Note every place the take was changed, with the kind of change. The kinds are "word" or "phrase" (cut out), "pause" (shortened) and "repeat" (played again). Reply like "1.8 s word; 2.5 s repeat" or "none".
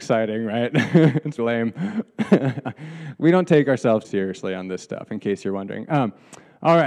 1.4 s word; 4.0 s word